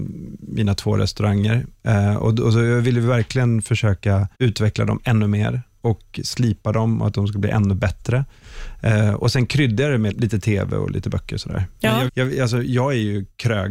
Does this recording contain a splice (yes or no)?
yes